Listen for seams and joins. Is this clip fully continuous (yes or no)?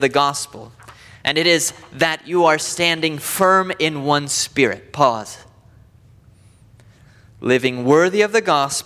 yes